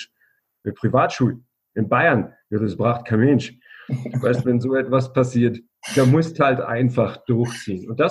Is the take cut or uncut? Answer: uncut